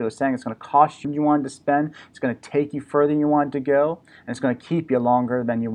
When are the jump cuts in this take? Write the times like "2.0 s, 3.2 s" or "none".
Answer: 1.0 s